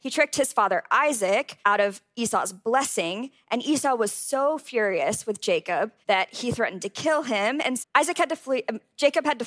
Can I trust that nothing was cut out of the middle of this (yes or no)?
no